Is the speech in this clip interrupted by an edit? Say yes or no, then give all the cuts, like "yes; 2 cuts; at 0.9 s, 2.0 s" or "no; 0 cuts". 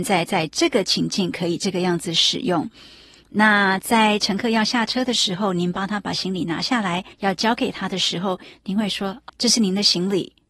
yes; 2 cuts; at 7.1 s, 9.3 s